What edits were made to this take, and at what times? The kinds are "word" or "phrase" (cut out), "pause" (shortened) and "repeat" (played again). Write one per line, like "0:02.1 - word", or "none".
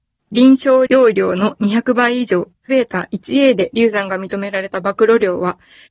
0:02.7 - word